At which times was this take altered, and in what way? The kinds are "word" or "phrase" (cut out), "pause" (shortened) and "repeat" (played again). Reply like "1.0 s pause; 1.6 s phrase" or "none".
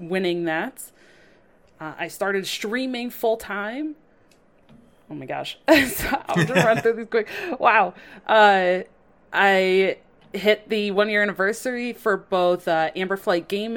none